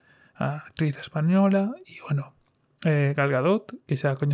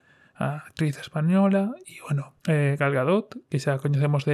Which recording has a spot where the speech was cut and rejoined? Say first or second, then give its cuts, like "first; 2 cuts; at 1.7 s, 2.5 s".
second; 1 cut; at 2.4 s